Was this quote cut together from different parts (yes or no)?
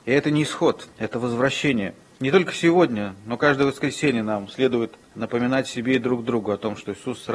yes